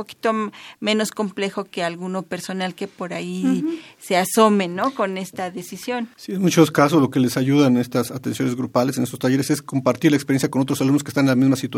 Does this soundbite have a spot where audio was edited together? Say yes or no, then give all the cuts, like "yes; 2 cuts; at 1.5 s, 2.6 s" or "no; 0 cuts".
yes; 1 cut; at 6.1 s